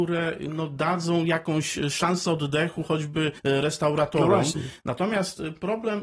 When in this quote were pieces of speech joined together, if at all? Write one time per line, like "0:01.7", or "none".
0:03.4